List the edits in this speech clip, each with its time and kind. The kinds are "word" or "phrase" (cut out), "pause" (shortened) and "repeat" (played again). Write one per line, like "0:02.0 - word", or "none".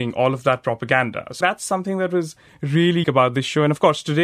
0:01.4 - phrase
0:03.0 - word